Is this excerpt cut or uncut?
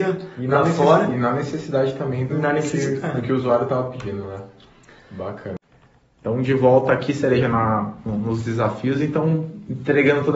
uncut